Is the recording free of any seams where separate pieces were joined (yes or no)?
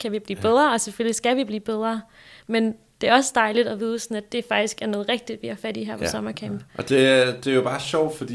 yes